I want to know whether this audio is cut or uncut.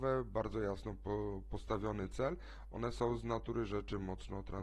uncut